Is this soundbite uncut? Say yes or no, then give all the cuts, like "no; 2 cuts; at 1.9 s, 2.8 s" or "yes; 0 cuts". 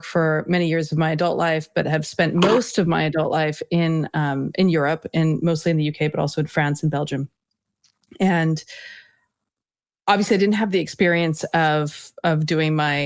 yes; 0 cuts